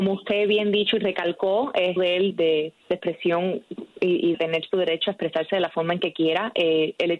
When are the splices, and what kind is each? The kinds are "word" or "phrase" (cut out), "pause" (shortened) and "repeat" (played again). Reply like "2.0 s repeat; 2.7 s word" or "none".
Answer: 2.0 s phrase; 2.3 s word; 2.8 s pause; 4.3 s phrase